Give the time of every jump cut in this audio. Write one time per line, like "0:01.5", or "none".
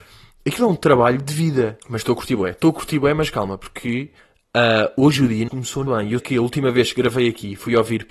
0:01.8
0:04.2
0:05.5
0:05.9
0:06.2